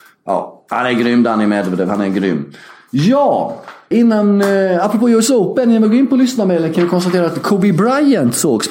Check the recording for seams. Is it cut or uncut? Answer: cut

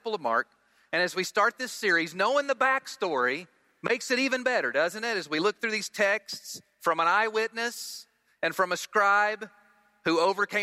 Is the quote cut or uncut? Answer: uncut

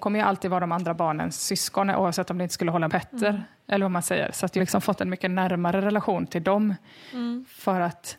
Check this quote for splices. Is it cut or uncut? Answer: cut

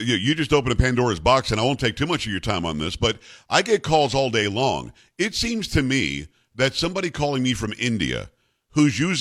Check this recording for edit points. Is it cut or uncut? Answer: uncut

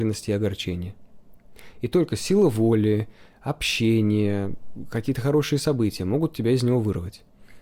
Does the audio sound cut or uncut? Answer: uncut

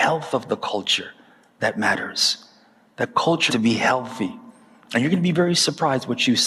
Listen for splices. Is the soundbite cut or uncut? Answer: cut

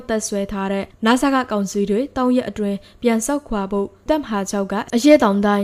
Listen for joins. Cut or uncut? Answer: cut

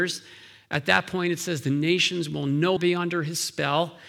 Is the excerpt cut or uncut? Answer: cut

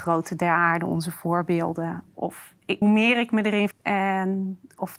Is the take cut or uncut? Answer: cut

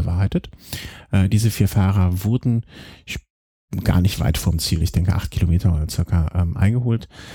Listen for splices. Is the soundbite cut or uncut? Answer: uncut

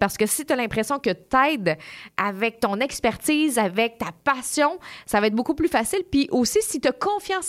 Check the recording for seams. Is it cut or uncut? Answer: uncut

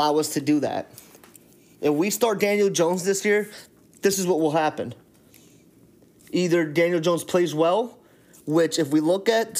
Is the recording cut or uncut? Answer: uncut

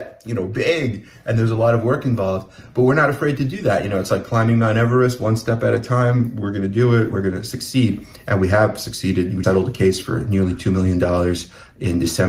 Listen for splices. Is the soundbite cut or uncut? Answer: cut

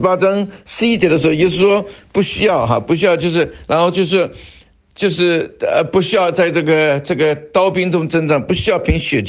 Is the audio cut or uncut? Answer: uncut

